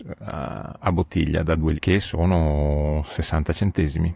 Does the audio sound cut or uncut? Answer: cut